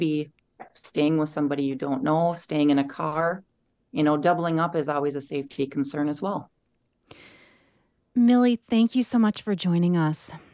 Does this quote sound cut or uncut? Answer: uncut